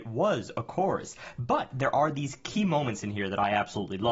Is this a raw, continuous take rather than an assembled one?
yes; 0 cuts

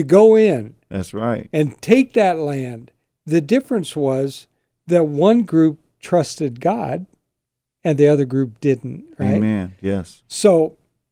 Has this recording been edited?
no; 0 cuts

